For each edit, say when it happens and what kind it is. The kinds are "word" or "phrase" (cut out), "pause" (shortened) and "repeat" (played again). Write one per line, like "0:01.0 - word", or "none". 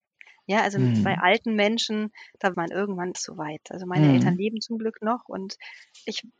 0:02.5 - word
0:03.1 - phrase